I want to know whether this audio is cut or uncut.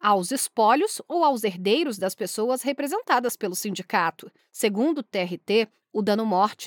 uncut